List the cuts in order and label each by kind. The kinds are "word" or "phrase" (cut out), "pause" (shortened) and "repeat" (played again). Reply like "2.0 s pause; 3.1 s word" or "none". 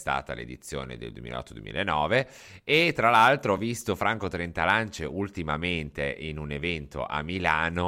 none